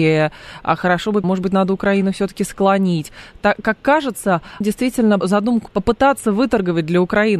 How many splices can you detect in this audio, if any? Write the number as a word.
four